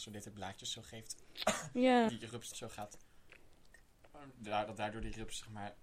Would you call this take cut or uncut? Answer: cut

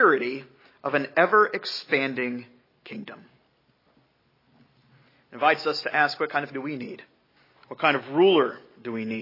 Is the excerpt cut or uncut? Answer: cut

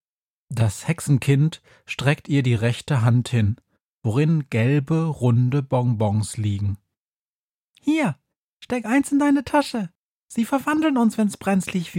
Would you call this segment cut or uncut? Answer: uncut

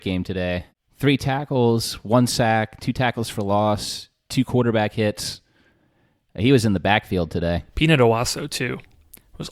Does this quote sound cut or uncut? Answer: uncut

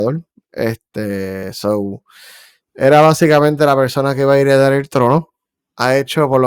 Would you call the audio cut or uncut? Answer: uncut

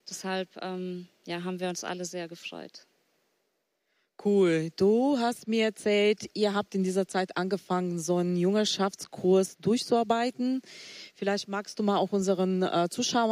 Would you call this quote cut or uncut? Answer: uncut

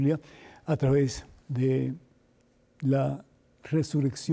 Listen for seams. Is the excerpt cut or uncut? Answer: uncut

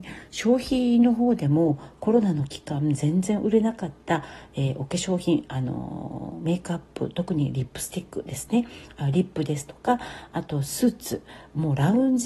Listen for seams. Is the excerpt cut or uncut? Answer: uncut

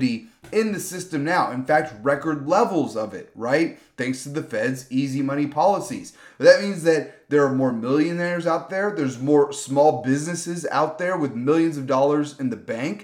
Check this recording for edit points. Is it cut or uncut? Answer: uncut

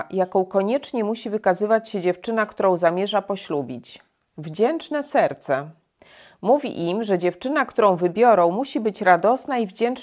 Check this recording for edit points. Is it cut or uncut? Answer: uncut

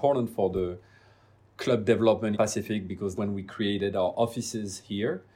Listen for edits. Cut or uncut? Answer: cut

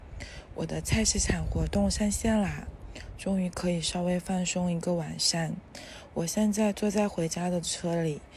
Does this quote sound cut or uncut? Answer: uncut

